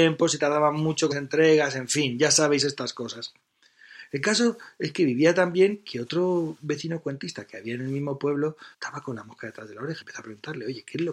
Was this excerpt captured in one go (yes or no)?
no